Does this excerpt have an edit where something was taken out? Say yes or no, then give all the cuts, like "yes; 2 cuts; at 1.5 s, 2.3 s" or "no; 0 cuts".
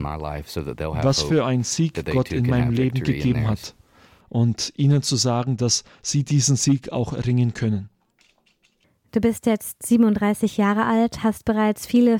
no; 0 cuts